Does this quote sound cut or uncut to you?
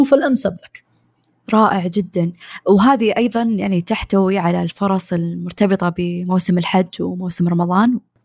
uncut